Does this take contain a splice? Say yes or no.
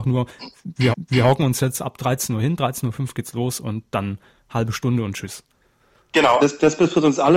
yes